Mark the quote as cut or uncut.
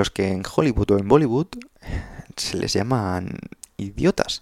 uncut